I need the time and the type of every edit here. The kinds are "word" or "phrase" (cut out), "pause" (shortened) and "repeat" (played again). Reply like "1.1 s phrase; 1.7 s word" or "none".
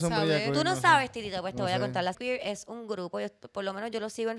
2.1 s word